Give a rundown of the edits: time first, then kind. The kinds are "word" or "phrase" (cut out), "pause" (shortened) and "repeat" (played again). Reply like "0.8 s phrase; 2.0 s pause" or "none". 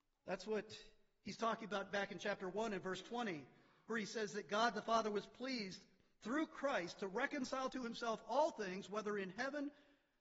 none